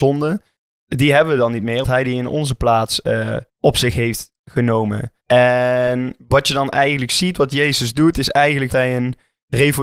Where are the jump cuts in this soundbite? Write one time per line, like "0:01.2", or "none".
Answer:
0:01.8
0:03.5
0:05.2
0:08.7